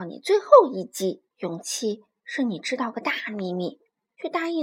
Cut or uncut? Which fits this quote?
cut